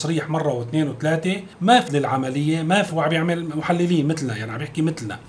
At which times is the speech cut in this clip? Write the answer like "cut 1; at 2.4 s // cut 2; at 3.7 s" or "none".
cut 1; at 1.5 s // cut 2; at 1.9 s // cut 3; at 2.9 s

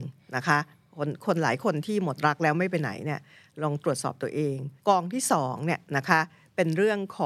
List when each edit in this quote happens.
cut 1; at 4.8 s

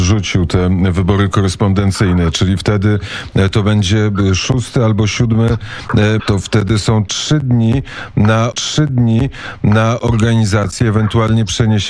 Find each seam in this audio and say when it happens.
cut 1; at 6.2 s // cut 2; at 8.5 s

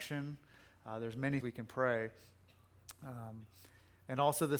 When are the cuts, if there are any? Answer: cut 1; at 1.4 s

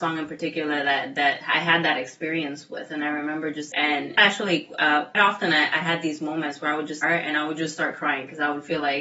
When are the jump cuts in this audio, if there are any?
cut 1; at 3.7 s // cut 2; at 4.2 s // cut 3; at 5.1 s // cut 4; at 7.0 s

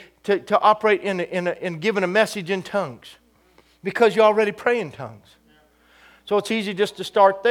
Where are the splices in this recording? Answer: none

